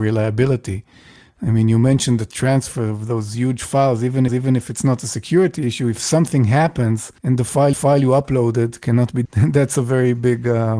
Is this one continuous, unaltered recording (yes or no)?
no